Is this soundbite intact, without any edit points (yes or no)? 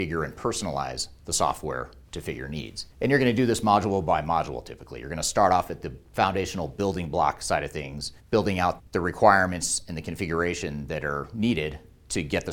no